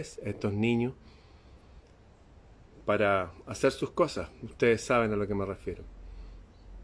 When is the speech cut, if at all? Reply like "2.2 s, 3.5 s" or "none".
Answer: none